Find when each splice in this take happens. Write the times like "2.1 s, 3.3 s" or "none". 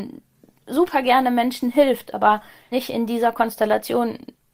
2.7 s